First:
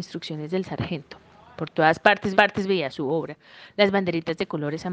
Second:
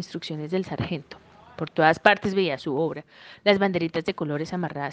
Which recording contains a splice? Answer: first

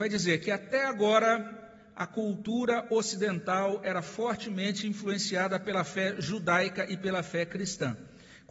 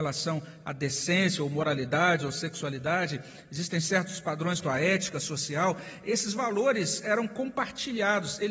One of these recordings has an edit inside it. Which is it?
second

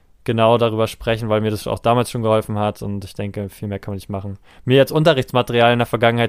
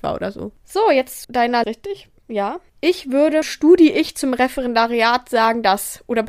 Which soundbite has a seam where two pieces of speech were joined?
second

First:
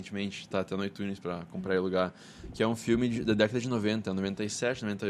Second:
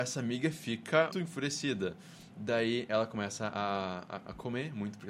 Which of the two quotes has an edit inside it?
second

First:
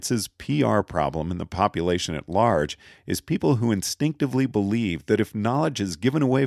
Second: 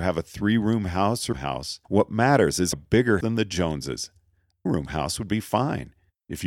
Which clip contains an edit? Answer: second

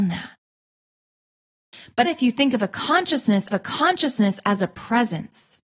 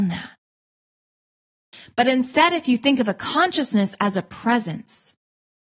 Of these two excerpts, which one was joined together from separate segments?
first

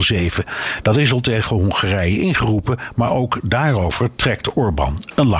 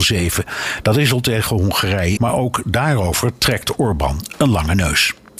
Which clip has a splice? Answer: second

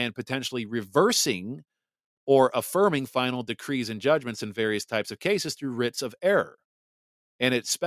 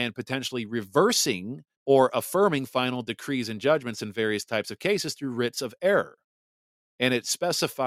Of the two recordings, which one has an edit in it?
second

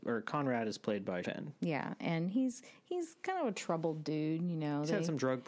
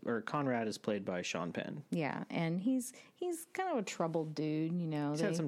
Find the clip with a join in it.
first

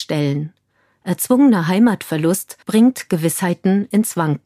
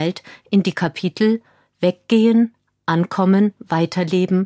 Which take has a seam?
first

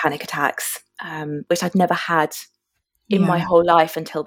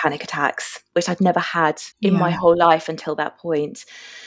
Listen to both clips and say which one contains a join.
second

